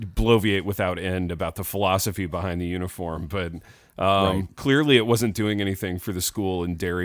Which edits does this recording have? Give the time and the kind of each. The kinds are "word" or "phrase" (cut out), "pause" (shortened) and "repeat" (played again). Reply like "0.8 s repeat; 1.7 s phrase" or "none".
none